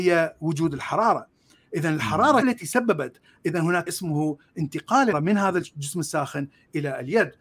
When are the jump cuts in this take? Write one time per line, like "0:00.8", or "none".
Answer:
0:02.4
0:03.9
0:05.1